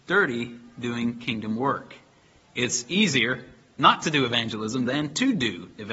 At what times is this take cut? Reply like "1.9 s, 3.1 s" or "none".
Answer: none